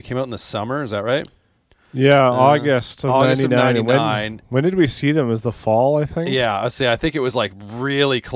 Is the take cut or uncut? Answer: uncut